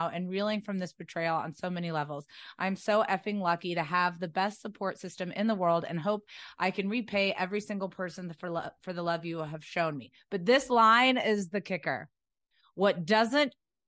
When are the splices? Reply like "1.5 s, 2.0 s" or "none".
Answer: none

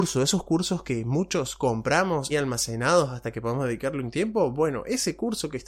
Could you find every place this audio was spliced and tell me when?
2.3 s

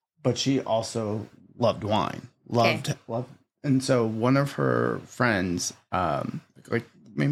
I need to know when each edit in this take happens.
none

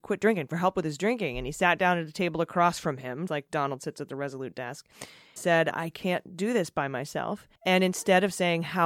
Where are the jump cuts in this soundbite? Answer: 3.3 s, 5.4 s, 5.7 s, 7.6 s

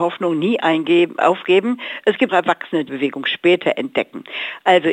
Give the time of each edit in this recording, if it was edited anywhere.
2.3 s, 2.9 s

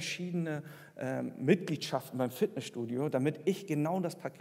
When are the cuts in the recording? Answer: none

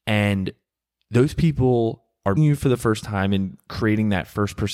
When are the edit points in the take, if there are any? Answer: 2.4 s

